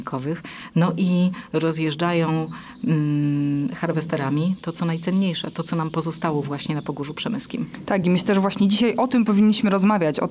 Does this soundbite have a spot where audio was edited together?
no; 0 cuts

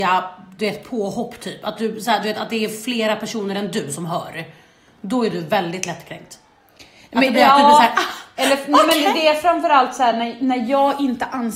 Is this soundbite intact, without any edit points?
yes; 0 cuts

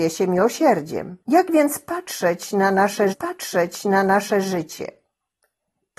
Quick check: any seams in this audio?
yes; 2 cuts; at 1.2 s, 3.1 s

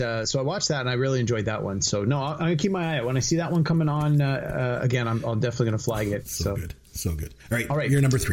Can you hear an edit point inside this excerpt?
yes; 1 cut; at 7.4 s

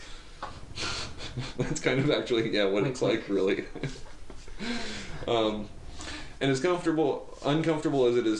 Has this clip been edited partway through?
no; 0 cuts

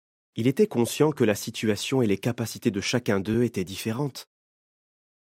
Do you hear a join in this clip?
no; 0 cuts

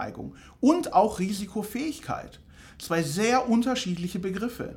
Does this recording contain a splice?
no; 0 cuts

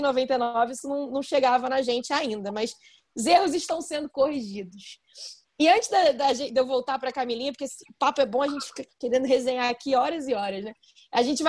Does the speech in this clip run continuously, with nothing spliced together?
yes; 0 cuts

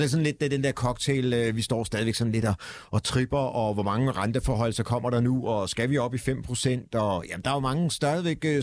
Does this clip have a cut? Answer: no; 0 cuts

